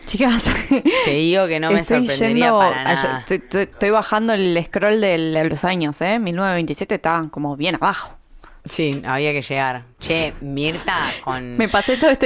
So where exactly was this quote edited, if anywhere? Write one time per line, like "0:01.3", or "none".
0:08.6